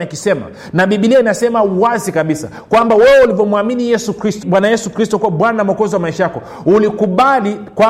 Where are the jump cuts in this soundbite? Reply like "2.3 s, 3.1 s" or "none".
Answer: 4.4 s